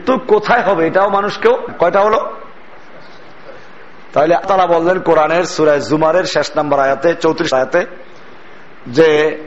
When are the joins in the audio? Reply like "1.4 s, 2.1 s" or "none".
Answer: 1.7 s, 4.4 s, 7.5 s